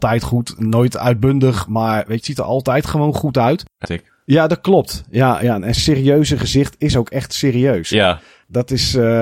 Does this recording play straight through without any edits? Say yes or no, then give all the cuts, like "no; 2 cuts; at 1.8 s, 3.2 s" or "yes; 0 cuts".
no; 3 cuts; at 2.2 s, 3.8 s, 5.8 s